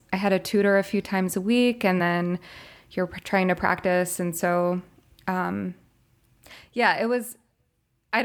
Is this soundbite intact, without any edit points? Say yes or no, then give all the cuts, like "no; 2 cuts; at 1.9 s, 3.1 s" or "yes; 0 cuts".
yes; 0 cuts